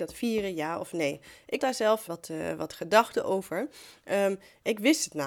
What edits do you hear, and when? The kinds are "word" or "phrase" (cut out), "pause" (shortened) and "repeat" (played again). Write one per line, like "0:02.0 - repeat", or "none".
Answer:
0:01.6 - word
0:02.1 - word

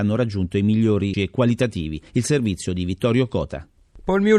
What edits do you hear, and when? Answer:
0:01.1 - phrase
0:02.1 - pause

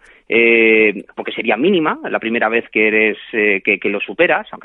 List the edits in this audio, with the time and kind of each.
0:01.1 - pause

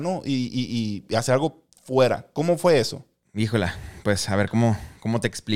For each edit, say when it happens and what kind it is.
none

